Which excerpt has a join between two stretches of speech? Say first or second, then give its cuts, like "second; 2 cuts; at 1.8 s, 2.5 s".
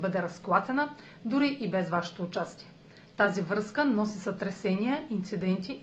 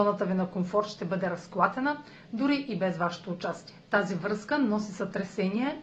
second; 1 cut; at 3.8 s